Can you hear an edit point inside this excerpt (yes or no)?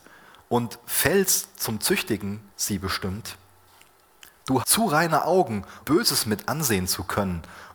yes